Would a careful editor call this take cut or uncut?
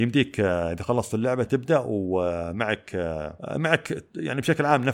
cut